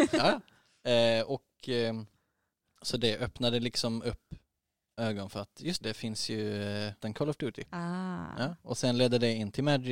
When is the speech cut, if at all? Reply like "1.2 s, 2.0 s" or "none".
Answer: 5.0 s, 5.8 s, 7.0 s